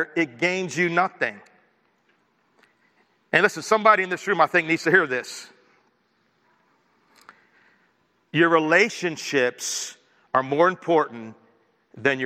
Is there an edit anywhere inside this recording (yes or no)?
no